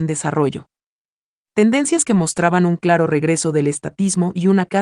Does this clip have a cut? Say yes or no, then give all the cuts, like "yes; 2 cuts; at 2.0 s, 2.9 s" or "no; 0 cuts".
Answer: no; 0 cuts